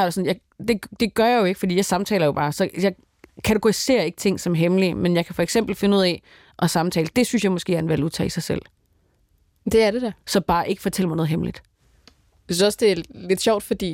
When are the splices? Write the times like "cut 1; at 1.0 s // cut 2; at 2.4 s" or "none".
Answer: none